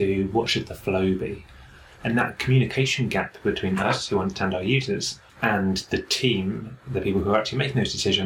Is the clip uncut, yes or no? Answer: no